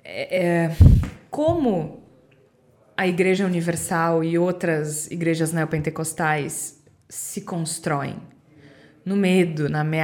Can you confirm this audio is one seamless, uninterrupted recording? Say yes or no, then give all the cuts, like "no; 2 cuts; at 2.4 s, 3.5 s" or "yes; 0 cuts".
yes; 0 cuts